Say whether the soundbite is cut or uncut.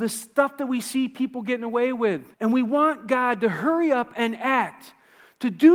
cut